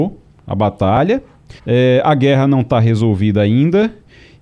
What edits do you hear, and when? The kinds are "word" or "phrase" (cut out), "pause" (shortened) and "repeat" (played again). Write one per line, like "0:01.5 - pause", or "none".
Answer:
0:01.6 - pause